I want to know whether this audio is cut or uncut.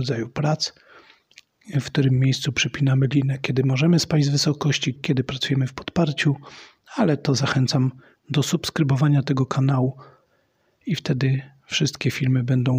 cut